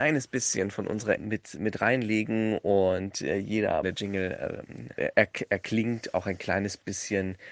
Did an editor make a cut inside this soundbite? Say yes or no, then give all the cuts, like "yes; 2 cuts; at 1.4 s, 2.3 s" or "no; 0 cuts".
yes; 3 cuts; at 1.2 s, 3.8 s, 5.0 s